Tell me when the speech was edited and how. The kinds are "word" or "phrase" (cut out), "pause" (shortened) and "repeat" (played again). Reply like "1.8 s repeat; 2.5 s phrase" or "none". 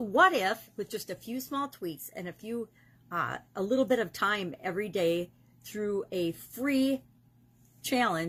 none